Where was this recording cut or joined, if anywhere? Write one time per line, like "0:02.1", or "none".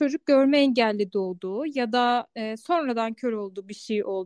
none